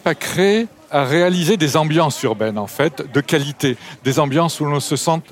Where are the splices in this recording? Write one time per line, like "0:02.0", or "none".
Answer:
none